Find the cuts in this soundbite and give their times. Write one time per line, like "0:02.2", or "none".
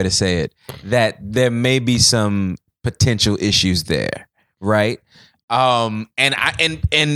none